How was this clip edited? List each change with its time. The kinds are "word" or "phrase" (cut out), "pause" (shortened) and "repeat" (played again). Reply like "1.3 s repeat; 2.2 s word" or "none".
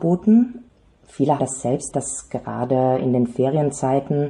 1.4 s word; 1.9 s word